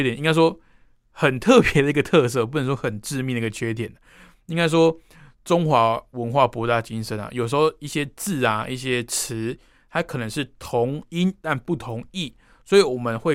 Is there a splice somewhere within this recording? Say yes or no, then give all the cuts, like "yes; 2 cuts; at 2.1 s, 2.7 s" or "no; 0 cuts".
no; 0 cuts